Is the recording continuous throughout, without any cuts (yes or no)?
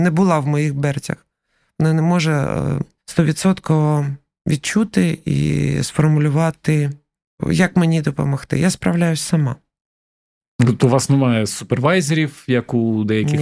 yes